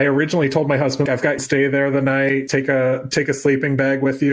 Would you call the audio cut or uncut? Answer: cut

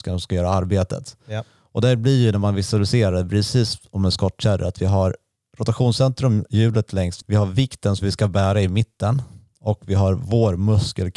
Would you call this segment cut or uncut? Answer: cut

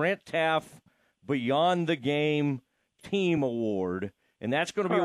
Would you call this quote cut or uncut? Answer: uncut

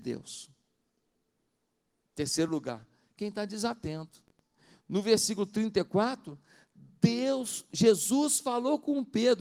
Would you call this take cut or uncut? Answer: uncut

